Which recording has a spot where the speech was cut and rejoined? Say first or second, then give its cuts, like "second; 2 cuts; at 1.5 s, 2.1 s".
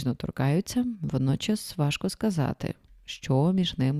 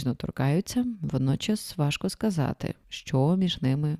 second; 1 cut; at 2.8 s